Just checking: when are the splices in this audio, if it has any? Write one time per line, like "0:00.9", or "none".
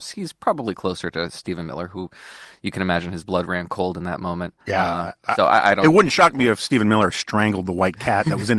0:04.6

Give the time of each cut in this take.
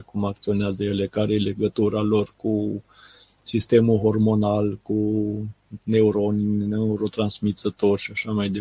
0:05.8

